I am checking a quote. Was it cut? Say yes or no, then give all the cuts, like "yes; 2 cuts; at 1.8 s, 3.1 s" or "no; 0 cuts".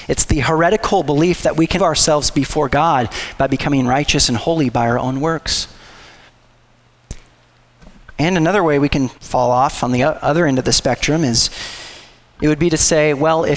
yes; 2 cuts; at 1.8 s, 9.2 s